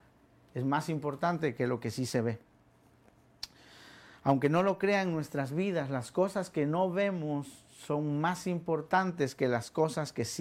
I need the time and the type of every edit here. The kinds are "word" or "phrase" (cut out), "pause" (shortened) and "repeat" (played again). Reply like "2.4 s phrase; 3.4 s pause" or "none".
none